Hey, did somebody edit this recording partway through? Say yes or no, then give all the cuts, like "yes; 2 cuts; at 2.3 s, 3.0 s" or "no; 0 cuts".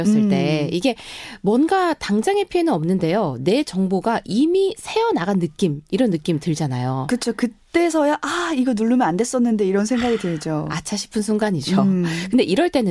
no; 0 cuts